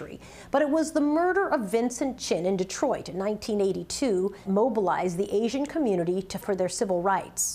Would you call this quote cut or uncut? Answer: cut